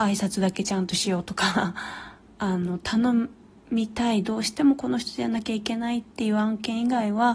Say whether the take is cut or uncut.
cut